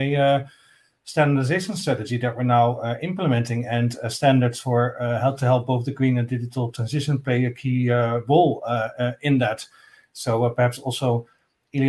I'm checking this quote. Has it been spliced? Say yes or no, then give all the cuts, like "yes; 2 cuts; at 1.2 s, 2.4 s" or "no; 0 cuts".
no; 0 cuts